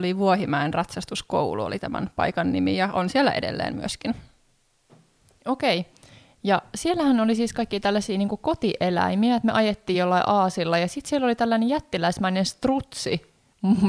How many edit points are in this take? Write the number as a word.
zero